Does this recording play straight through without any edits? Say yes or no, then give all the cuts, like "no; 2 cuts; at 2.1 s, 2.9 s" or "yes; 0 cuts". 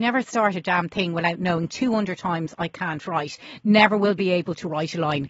yes; 0 cuts